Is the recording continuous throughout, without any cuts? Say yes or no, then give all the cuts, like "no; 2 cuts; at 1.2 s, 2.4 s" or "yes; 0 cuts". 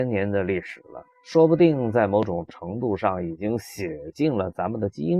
no; 1 cut; at 1.1 s